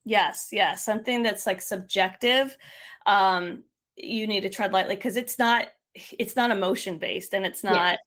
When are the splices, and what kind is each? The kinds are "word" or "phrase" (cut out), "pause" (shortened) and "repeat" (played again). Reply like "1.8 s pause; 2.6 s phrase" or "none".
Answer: none